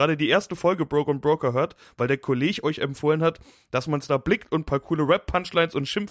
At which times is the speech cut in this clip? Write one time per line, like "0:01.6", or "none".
none